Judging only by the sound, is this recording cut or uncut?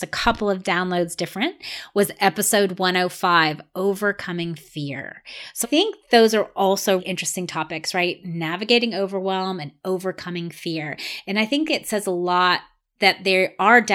cut